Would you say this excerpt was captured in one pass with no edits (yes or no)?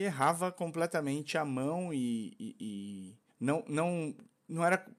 no